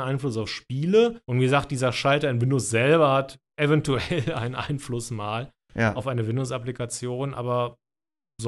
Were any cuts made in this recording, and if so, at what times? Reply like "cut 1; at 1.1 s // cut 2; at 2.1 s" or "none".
cut 1; at 1.2 s